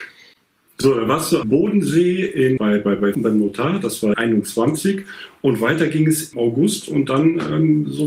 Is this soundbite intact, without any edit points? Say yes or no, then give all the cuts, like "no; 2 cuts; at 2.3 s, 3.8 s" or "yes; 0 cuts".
no; 5 cuts; at 1.4 s, 2.6 s, 3.1 s, 4.1 s, 6.3 s